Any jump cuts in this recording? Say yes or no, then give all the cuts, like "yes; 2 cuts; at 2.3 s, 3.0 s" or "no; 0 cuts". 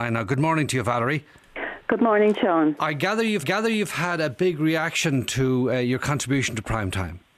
yes; 1 cut; at 3.4 s